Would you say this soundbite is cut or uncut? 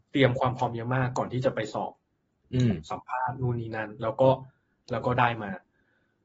uncut